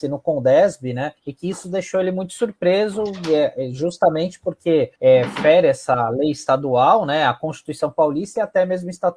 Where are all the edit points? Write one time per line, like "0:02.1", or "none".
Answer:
0:01.2
0:05.0